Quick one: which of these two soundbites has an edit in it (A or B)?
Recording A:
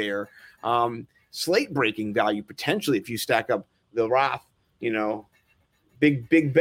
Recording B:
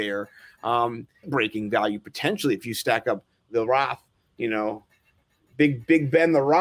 B